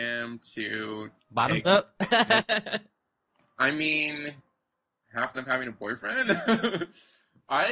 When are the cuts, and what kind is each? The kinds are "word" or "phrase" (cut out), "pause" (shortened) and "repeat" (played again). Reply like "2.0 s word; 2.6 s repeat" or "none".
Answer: 1.2 s pause; 3.6 s word; 5.0 s phrase; 5.3 s word